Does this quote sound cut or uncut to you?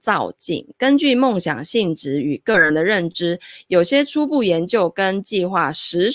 uncut